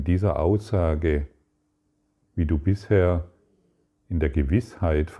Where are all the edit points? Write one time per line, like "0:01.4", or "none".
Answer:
0:02.2

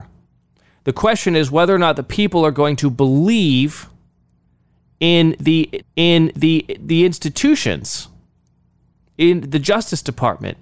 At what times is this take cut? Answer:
0:05.8

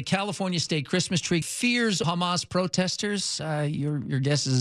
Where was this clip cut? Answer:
0:01.4
0:02.0

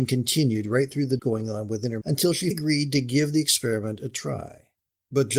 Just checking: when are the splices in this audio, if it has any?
0:01.2
0:02.0
0:02.5

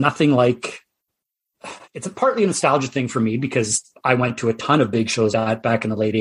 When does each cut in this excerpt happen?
0:01.8
0:05.3

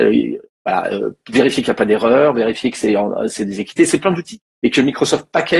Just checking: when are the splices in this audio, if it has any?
0:04.4

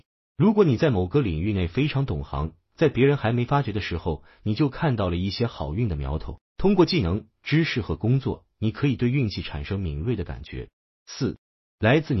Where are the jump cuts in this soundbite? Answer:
0:06.5

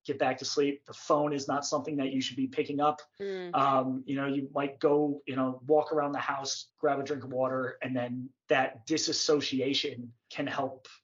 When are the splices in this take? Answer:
0:06.7

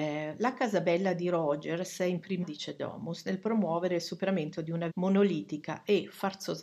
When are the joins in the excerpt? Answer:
0:02.4
0:04.9

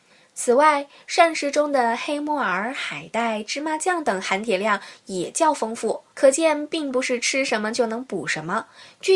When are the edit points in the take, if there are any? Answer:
0:06.1

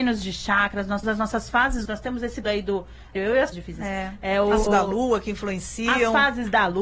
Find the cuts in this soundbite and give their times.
0:01.0
0:01.9
0:02.4
0:03.2
0:03.5
0:04.7

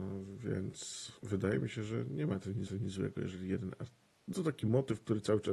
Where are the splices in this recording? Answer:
0:01.2
0:02.7
0:04.3

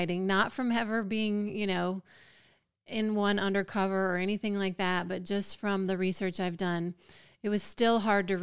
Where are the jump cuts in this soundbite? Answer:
none

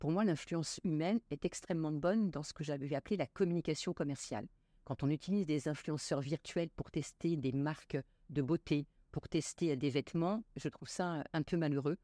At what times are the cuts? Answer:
none

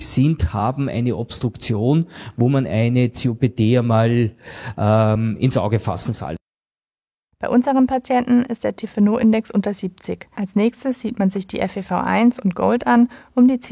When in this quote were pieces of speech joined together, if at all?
none

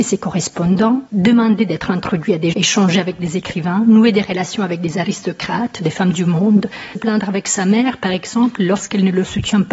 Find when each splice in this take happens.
0:01.1
0:02.5
0:07.0

